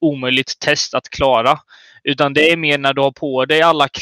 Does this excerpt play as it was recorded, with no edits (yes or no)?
yes